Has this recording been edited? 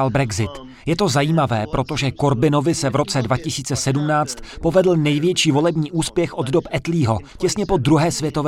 no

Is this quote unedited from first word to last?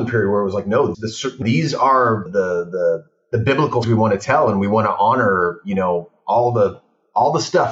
no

